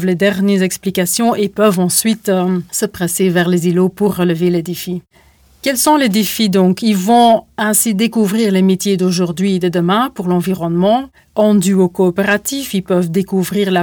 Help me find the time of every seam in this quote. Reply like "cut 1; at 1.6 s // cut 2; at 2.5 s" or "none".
none